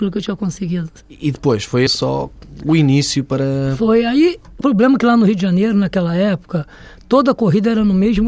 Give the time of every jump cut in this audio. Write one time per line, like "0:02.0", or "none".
0:01.9
0:04.6